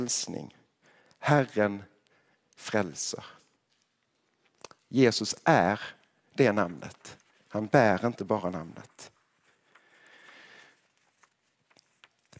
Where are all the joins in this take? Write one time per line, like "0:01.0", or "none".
none